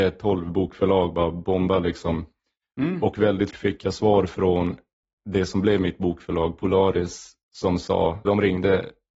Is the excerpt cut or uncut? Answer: cut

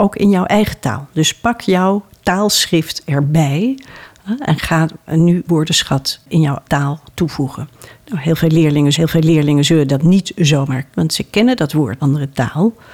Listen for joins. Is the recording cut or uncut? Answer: cut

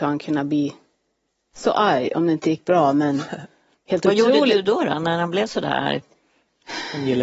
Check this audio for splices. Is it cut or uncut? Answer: uncut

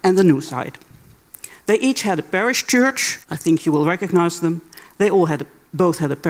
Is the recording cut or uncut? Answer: cut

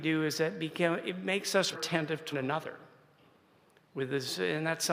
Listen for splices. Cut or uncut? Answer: cut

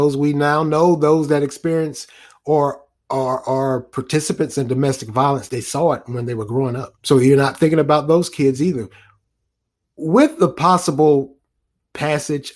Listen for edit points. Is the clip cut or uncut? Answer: cut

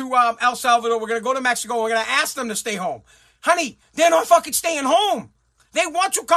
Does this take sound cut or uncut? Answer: uncut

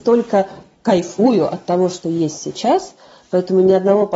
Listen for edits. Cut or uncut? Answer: uncut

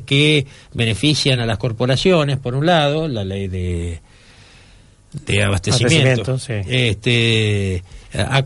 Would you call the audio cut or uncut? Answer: uncut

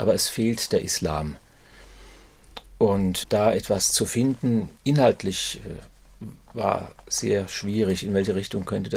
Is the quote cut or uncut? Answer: cut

